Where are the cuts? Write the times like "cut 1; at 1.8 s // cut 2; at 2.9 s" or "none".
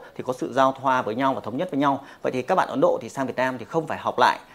none